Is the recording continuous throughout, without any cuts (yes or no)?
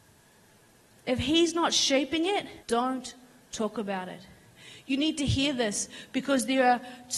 no